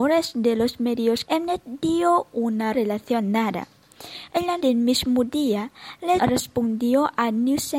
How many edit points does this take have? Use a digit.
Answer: 4